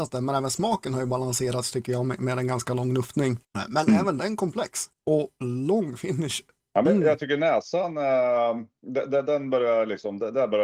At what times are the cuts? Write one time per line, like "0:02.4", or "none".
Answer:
none